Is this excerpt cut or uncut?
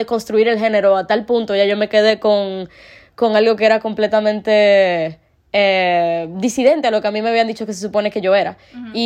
uncut